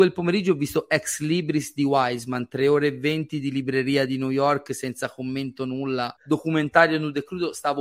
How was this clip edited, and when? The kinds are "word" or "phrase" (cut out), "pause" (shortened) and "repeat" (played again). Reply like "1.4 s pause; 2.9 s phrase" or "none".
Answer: 6.2 s pause